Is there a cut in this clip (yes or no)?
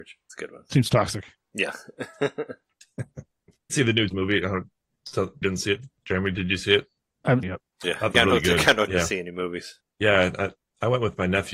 yes